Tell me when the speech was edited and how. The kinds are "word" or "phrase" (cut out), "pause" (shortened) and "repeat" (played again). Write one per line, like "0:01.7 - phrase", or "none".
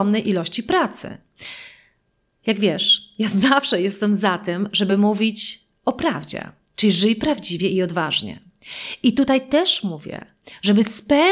none